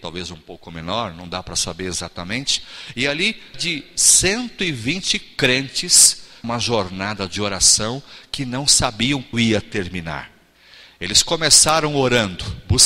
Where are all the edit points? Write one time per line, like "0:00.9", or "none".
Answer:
0:03.5
0:06.4
0:09.3

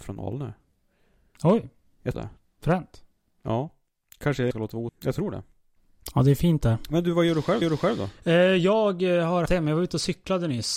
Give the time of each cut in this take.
0:02.1
0:03.9
0:04.5
0:04.9
0:07.6
0:09.5

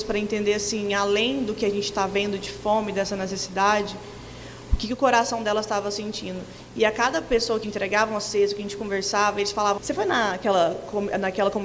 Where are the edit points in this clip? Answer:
0:07.6
0:09.8

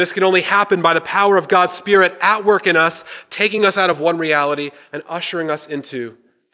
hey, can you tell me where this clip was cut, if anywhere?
none

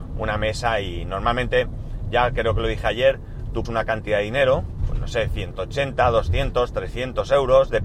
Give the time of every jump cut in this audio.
0:03.6

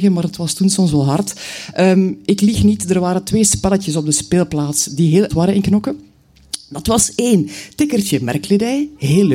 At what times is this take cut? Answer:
0:05.3

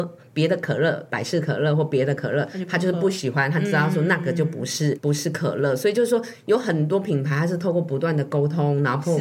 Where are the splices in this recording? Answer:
0:05.0

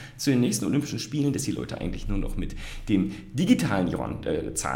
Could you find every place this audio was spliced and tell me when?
none

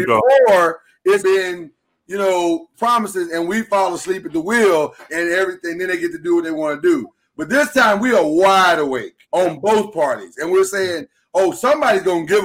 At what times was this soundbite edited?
0:01.2
0:02.7
0:05.1
0:09.2

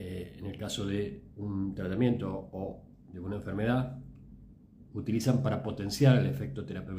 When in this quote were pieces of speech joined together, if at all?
0:04.8

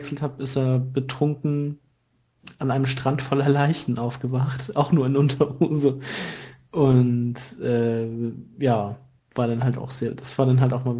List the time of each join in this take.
0:09.2

